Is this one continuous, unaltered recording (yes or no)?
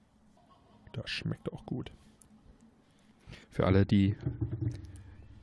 no